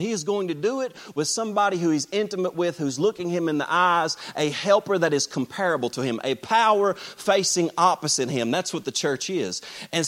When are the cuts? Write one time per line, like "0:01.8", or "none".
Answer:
none